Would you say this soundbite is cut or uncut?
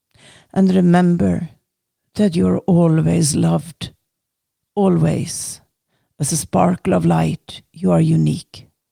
uncut